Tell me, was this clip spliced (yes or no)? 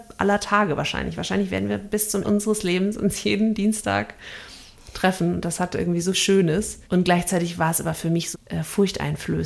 yes